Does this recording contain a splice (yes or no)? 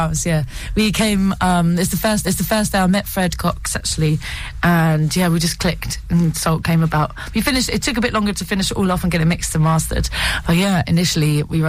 yes